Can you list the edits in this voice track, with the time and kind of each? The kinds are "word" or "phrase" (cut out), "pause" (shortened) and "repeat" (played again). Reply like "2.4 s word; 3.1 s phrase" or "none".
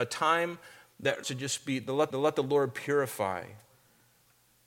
1.2 s phrase; 2.1 s repeat